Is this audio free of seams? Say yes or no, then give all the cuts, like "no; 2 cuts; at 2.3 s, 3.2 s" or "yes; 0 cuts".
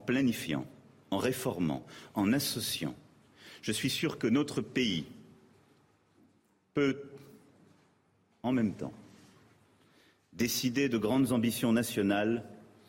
yes; 0 cuts